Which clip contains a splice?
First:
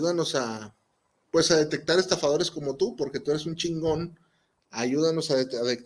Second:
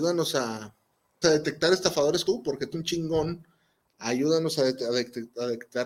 second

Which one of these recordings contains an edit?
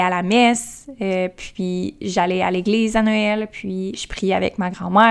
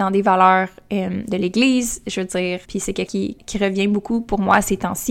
second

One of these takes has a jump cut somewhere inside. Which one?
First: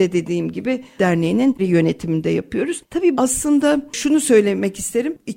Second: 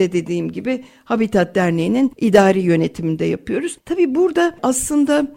first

